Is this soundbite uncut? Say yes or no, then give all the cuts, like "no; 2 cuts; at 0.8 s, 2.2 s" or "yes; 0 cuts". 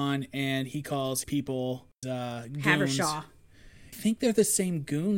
no; 3 cuts; at 1.2 s, 2.0 s, 3.9 s